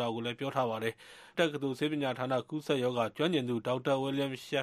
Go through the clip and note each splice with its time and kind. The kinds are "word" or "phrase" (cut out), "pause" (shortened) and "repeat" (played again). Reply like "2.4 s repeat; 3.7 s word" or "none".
1.3 s word